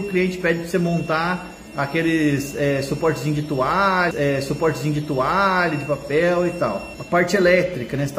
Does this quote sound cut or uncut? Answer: cut